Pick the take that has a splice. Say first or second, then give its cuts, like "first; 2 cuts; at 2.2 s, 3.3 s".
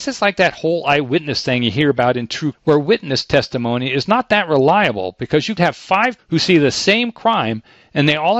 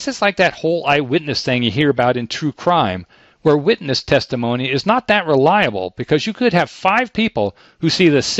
first; 3 cuts; at 2.5 s, 5.6 s, 6.2 s